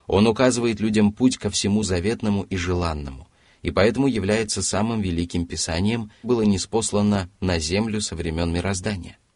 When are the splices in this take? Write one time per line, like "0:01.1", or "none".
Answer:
0:06.2